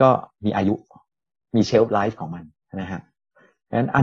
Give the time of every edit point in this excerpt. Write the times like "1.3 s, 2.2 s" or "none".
2.6 s

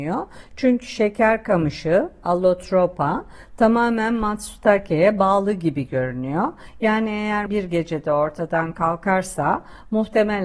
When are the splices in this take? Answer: 7.5 s

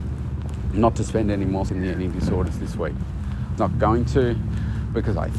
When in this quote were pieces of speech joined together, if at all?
1.7 s, 3.6 s

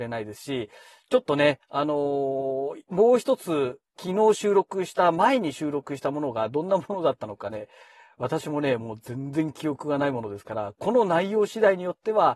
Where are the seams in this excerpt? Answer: 3.9 s

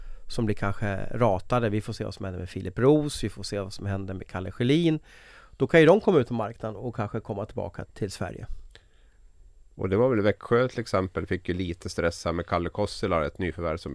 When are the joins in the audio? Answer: 7.8 s

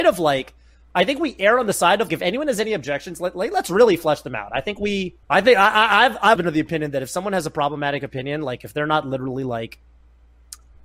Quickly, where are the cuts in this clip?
2.1 s, 5.2 s, 6.4 s

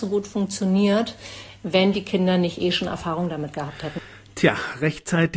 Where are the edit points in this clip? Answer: none

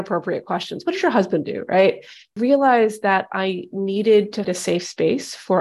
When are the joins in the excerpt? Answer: 2.4 s, 4.4 s

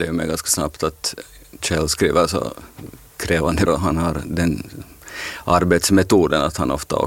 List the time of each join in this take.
1.6 s, 3.7 s

